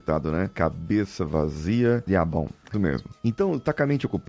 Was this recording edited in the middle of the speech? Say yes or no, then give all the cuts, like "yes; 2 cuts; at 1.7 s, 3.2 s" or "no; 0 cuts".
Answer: yes; 2 cuts; at 2.1 s, 2.7 s